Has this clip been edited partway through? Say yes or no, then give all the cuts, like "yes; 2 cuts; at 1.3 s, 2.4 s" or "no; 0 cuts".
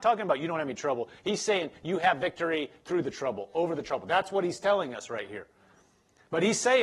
no; 0 cuts